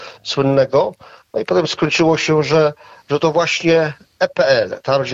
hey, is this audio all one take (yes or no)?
yes